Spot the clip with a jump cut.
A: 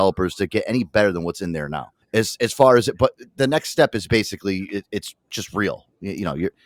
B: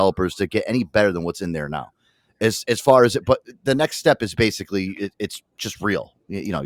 A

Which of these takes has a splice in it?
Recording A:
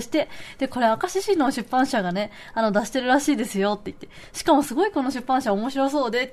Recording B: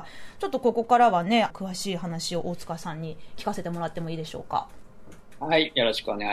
B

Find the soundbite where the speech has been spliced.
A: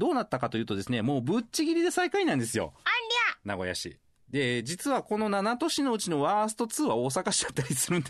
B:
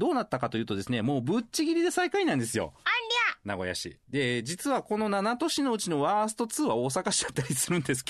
B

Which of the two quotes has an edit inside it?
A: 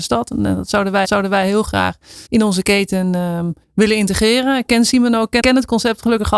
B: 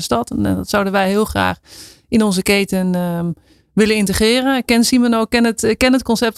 A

